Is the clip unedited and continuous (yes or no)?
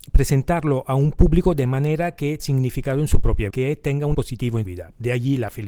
no